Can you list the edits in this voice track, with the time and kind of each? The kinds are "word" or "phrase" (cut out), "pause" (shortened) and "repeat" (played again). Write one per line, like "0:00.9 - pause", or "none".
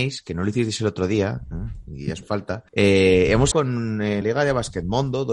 0:02.2 - word
0:02.7 - pause
0:03.5 - phrase
0:04.2 - word